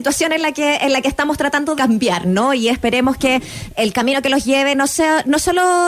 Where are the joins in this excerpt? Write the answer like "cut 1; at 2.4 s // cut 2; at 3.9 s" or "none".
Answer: cut 1; at 1.8 s // cut 2; at 3.7 s